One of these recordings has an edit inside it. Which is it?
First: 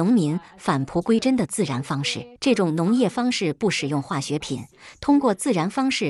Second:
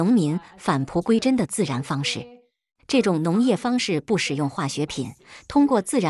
first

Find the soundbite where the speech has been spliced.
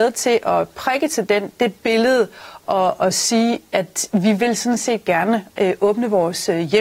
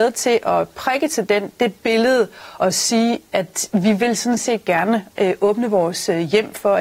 second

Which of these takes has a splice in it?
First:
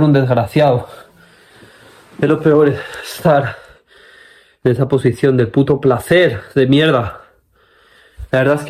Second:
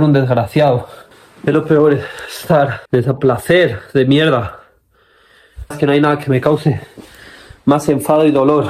second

